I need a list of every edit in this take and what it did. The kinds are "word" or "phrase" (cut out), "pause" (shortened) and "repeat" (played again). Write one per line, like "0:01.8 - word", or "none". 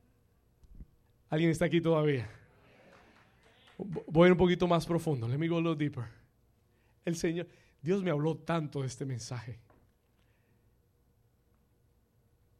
none